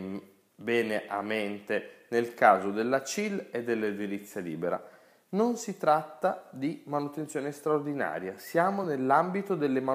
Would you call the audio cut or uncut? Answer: uncut